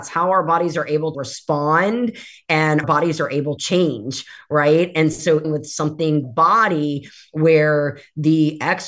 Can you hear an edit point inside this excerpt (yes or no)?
yes